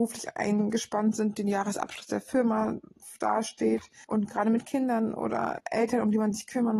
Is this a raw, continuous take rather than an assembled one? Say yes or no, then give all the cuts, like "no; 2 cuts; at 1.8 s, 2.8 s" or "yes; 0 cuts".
no; 2 cuts; at 4.0 s, 5.6 s